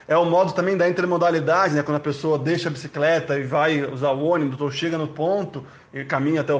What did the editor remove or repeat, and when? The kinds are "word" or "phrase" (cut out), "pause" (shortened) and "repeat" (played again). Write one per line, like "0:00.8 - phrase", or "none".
none